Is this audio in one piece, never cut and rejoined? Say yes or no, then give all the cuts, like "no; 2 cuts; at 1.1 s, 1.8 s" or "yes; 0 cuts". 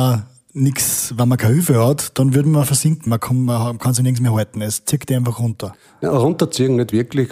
no; 1 cut; at 3.1 s